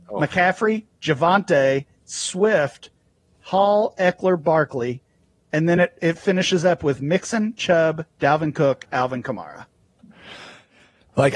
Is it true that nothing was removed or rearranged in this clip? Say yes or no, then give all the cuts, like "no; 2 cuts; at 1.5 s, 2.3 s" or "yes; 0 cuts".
yes; 0 cuts